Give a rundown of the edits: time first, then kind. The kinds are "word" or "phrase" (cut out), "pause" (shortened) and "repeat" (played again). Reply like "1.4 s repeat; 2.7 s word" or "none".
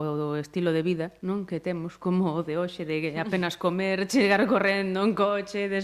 none